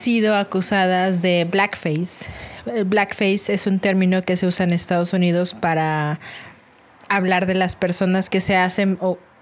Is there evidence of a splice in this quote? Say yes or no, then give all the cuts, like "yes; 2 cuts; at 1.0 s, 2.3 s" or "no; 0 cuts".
no; 0 cuts